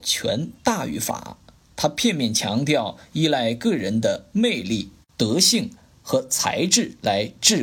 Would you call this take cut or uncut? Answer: uncut